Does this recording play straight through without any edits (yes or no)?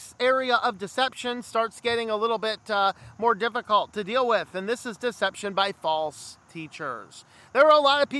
yes